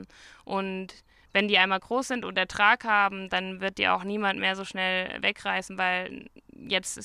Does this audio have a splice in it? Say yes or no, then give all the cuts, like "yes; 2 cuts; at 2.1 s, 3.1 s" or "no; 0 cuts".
no; 0 cuts